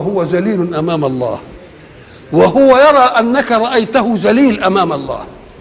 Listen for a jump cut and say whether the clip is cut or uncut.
uncut